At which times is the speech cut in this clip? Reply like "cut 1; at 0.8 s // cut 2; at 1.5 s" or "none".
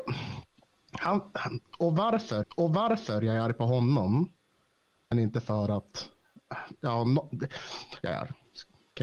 cut 1; at 2.4 s // cut 2; at 5.1 s // cut 3; at 8.0 s